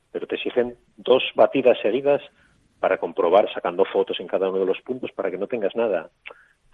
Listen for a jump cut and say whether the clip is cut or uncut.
uncut